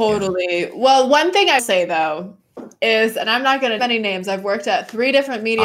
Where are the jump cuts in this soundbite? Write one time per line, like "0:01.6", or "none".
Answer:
0:01.6
0:03.8